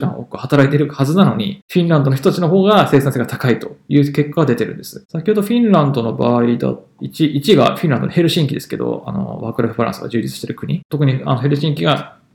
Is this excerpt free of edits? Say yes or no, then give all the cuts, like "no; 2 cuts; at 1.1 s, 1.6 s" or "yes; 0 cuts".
no; 1 cut; at 7.0 s